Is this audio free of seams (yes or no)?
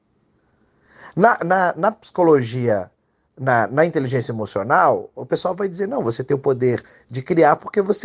yes